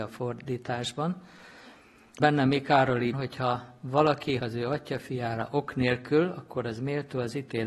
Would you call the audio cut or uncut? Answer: cut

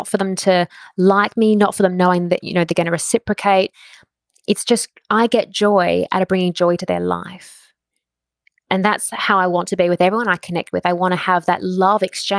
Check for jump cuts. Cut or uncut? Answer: uncut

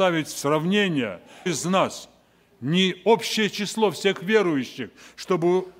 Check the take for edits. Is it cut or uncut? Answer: cut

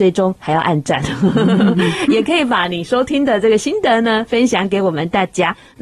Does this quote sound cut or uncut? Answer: uncut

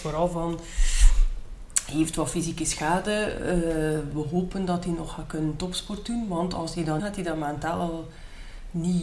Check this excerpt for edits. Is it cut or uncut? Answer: cut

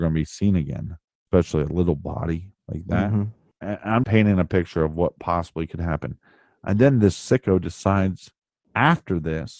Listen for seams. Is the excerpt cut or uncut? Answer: cut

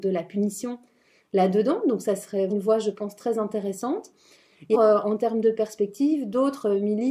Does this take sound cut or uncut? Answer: cut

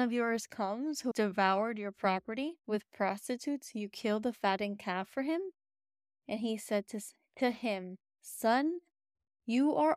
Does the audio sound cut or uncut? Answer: cut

